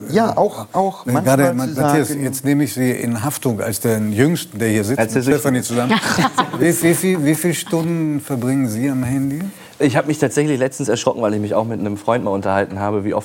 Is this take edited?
no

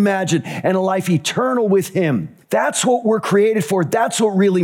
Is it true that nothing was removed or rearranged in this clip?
no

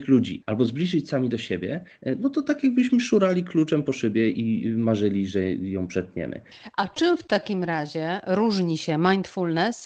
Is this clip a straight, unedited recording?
yes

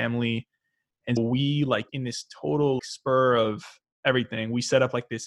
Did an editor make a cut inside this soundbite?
yes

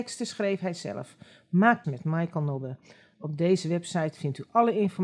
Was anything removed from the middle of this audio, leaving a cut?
yes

